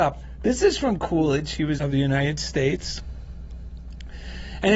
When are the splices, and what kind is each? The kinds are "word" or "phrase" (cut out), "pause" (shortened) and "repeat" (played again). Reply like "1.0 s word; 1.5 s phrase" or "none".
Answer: 1.0 s word; 1.8 s phrase